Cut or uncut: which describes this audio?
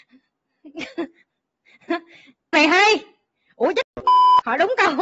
cut